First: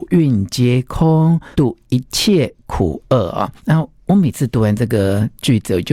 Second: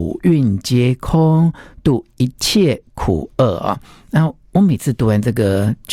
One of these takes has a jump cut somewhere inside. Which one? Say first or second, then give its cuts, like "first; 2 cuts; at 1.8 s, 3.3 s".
first; 2 cuts; at 1.5 s, 3.6 s